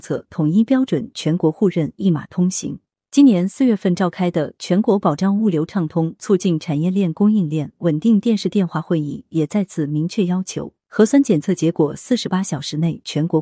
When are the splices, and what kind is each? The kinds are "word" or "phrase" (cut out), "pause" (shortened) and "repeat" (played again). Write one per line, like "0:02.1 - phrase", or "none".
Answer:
0:10.8 - pause